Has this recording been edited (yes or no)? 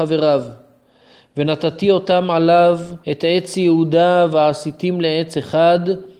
yes